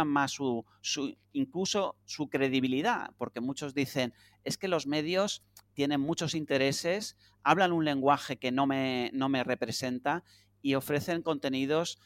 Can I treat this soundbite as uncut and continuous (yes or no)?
yes